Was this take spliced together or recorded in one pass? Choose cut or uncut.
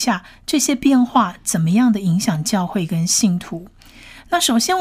uncut